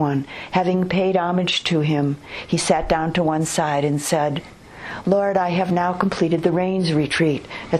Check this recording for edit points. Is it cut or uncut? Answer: uncut